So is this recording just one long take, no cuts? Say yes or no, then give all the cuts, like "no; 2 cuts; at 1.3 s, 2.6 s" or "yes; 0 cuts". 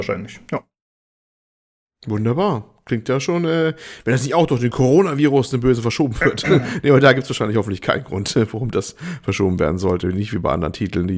yes; 0 cuts